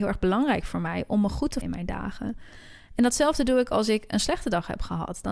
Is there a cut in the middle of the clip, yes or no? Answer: yes